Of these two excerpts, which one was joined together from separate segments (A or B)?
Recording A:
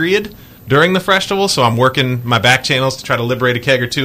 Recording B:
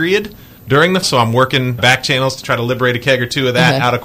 B